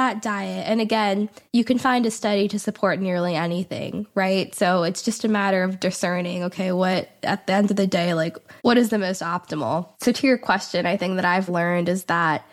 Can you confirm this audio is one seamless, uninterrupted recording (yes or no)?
no